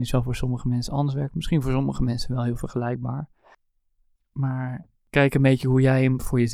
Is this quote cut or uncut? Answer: uncut